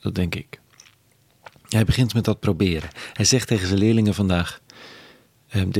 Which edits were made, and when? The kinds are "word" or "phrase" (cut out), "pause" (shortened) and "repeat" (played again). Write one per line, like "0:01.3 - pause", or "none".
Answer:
none